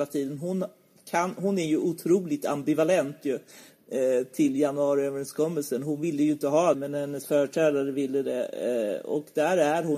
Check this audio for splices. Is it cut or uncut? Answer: cut